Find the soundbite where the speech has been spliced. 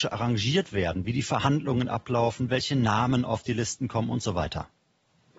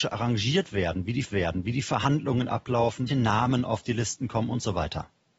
second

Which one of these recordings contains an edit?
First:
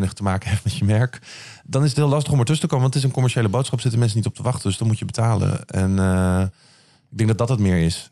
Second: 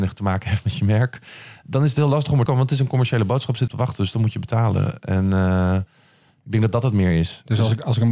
second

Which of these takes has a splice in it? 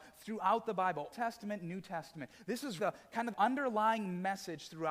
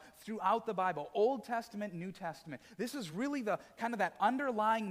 first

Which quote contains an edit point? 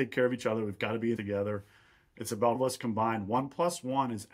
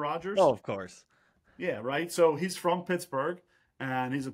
first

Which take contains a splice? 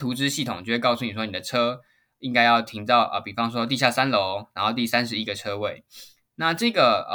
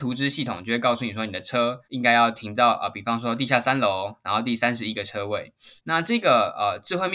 second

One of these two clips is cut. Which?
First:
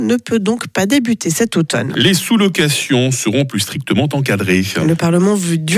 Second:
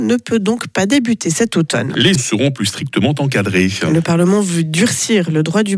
second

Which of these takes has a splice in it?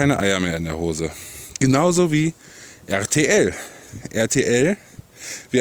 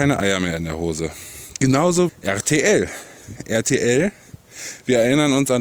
second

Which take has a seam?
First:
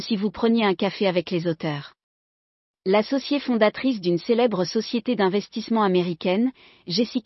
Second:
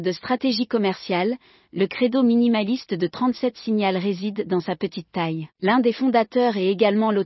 second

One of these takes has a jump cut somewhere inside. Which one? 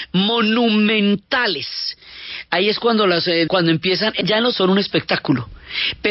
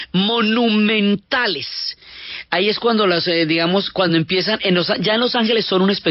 first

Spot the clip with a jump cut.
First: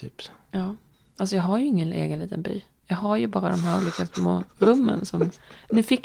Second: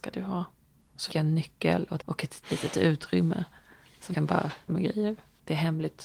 second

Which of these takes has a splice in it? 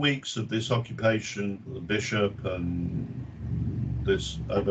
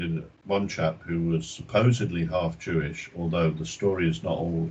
first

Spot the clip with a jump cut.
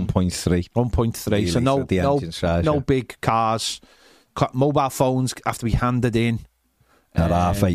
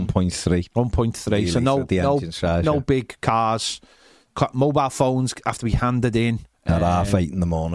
second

